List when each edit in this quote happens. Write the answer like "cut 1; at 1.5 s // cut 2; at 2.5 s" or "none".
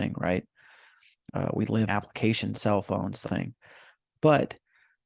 cut 1; at 1.9 s // cut 2; at 2.5 s // cut 3; at 3.2 s